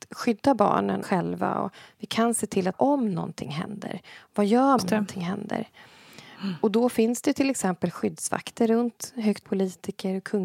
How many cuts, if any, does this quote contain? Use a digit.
4